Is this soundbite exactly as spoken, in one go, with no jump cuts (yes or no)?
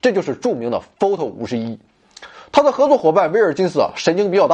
yes